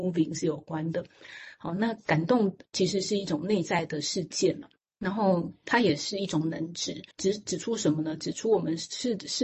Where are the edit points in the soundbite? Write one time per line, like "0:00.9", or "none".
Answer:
0:04.8
0:07.1